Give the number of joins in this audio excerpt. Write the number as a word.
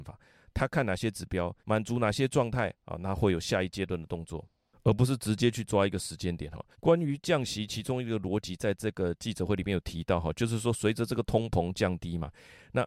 three